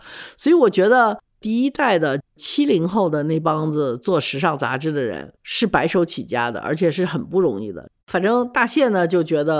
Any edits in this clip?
yes; 2 cuts; at 5.4 s, 8.0 s

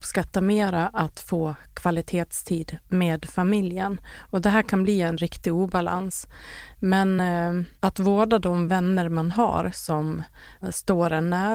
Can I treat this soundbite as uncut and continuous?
yes; 0 cuts

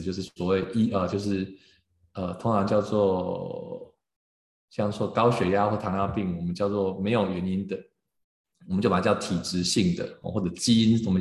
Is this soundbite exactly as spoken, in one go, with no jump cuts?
yes; 0 cuts

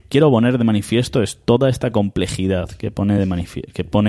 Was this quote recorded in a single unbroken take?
yes; 0 cuts

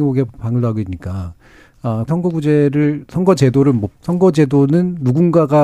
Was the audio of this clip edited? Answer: yes; 2 cuts; at 2.1 s, 3.9 s

